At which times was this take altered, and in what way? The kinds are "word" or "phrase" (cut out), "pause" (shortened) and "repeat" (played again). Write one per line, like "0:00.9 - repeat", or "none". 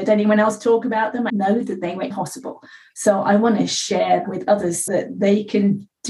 0:01.3 - word
0:02.1 - word
0:04.2 - word
0:04.9 - word